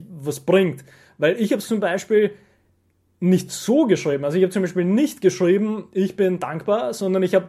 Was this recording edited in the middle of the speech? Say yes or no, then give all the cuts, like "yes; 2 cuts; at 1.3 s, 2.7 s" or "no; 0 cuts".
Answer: no; 0 cuts